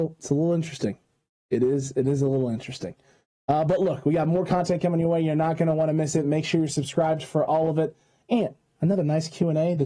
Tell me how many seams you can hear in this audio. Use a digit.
0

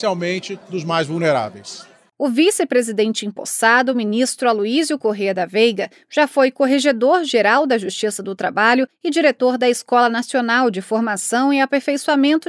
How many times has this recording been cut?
0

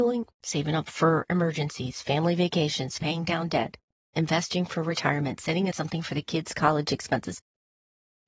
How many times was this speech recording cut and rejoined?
1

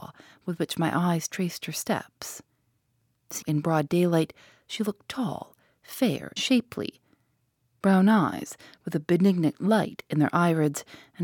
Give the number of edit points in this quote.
2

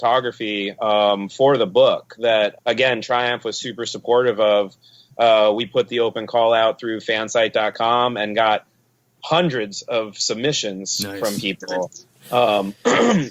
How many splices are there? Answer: 1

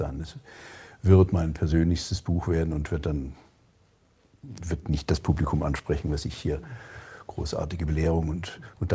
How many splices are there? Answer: 0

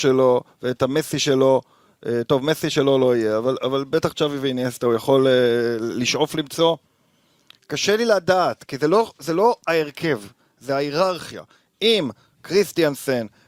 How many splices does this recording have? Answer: 0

